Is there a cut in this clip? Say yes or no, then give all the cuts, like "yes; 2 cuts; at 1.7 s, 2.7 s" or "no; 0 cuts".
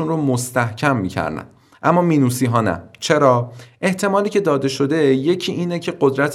no; 0 cuts